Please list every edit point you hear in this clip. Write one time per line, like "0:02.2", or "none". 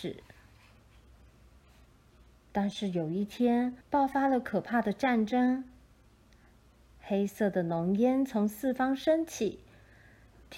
0:03.8